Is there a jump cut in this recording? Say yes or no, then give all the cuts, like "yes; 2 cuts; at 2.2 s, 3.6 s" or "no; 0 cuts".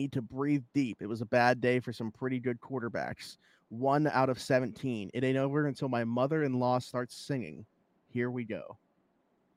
no; 0 cuts